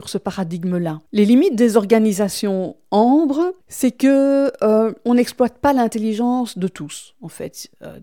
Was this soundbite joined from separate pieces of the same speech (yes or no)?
yes